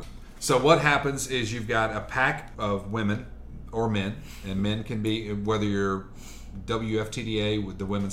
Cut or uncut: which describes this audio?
cut